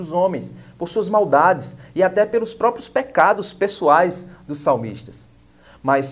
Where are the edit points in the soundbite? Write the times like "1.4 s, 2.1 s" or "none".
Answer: none